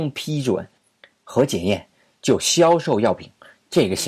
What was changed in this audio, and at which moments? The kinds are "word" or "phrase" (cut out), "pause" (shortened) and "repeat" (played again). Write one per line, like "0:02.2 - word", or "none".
none